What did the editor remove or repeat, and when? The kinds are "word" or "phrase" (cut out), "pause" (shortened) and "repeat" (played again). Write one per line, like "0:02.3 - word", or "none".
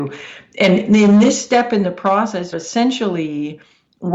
0:02.5 - word